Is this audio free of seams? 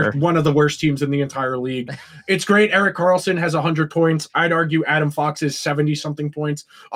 yes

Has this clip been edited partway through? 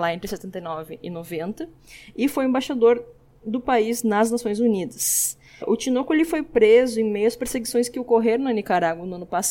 no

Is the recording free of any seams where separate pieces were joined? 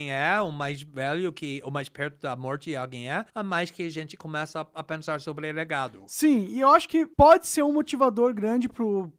no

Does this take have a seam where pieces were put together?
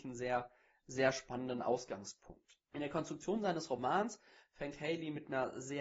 yes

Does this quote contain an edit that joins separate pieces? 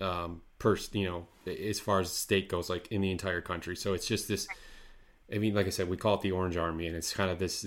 no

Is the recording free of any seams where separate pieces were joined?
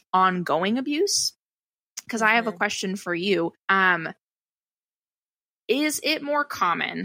no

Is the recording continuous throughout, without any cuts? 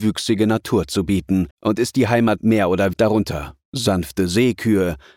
no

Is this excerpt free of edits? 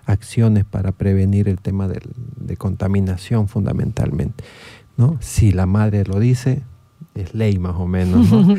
yes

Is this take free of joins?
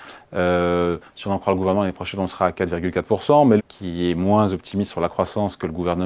no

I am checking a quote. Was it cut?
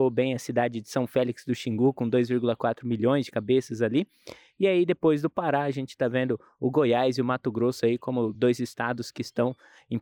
no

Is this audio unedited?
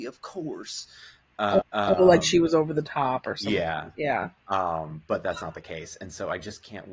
no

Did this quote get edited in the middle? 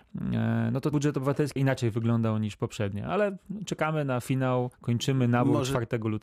yes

